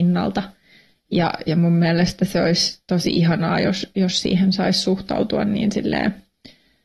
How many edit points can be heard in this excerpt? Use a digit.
0